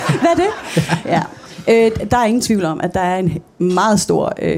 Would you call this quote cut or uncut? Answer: uncut